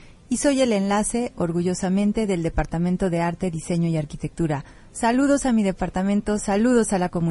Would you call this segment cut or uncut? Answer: uncut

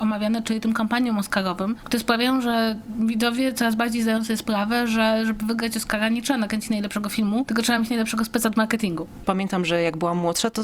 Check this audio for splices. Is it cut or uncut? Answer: uncut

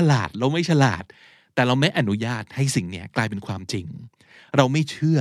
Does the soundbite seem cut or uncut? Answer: uncut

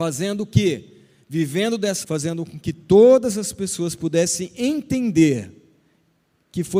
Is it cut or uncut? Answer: cut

